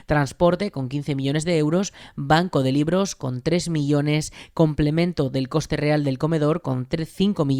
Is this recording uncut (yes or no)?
yes